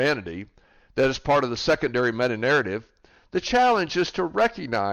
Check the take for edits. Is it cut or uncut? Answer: uncut